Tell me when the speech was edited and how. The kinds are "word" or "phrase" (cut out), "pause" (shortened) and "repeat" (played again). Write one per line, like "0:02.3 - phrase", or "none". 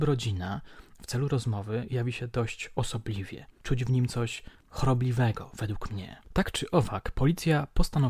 0:06.2 - pause